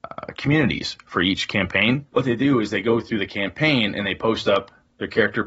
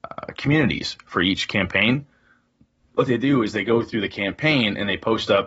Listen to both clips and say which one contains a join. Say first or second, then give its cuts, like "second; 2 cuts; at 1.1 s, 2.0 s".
first; 1 cut; at 2.1 s